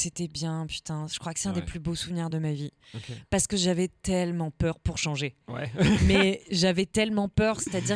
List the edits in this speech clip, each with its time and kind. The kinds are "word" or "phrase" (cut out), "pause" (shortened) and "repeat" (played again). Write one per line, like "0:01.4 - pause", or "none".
none